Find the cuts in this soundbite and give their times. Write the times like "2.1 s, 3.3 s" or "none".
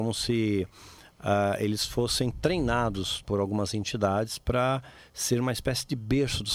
3.2 s